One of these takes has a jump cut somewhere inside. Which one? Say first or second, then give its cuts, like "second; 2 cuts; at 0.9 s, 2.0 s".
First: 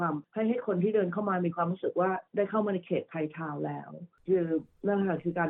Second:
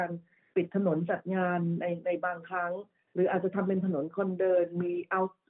first; 1 cut; at 2.3 s